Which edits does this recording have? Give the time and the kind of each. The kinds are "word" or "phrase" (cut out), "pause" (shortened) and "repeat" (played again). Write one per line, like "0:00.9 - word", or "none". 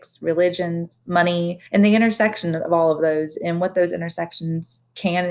0:01.7 - pause